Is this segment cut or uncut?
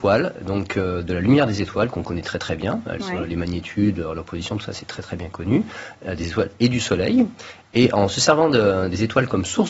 uncut